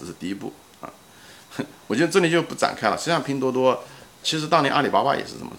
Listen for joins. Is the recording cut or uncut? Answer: cut